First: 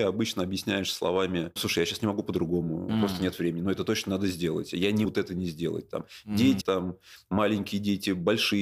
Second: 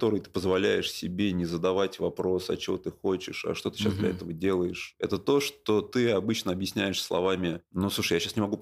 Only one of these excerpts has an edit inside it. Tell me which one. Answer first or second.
first